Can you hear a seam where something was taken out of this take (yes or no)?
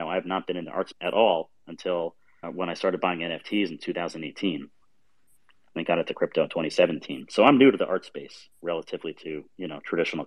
yes